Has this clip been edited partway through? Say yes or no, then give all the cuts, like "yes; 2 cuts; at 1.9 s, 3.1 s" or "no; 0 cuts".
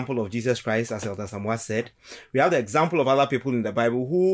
no; 0 cuts